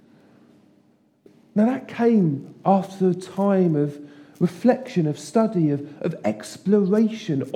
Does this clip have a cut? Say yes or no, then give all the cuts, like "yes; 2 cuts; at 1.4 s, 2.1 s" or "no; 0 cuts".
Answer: no; 0 cuts